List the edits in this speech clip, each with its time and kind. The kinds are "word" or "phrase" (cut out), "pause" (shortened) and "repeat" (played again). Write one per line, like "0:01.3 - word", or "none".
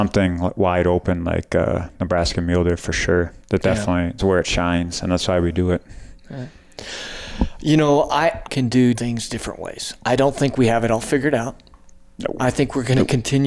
0:03.4 - pause
0:04.2 - phrase
0:08.4 - phrase
0:08.9 - word

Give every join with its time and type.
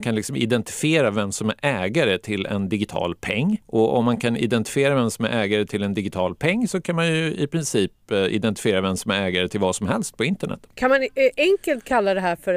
0:03.6 - pause
0:10.7 - pause

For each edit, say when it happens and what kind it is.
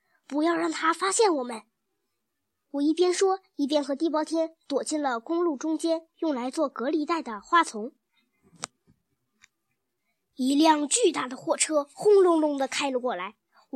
none

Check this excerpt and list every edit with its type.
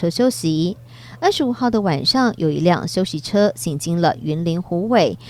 none

